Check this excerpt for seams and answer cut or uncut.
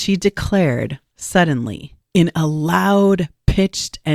uncut